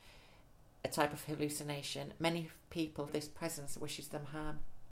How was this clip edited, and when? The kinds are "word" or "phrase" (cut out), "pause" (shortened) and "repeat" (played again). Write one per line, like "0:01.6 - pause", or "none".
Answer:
0:03.1 - word